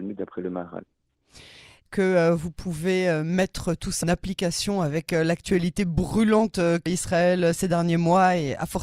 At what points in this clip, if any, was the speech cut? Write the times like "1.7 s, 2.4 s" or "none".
1.9 s, 4.0 s, 6.9 s